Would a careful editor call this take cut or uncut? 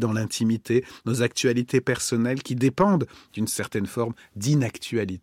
uncut